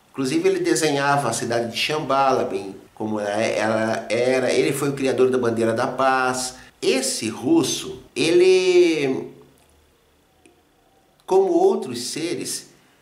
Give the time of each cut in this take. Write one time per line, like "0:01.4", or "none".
0:02.9
0:06.7
0:08.1